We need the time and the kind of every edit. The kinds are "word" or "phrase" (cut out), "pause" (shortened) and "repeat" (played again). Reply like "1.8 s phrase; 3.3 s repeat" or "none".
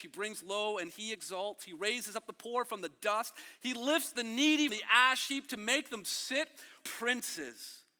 4.7 s word; 6.8 s word